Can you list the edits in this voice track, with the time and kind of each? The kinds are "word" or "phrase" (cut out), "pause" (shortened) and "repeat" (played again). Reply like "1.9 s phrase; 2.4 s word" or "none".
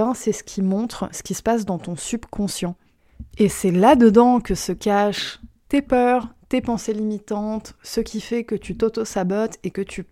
none